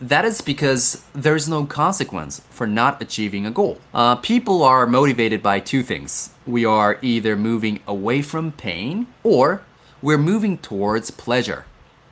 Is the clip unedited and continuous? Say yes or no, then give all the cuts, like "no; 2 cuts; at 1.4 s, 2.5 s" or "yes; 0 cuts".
no; 2 cuts; at 3.9 s, 9.1 s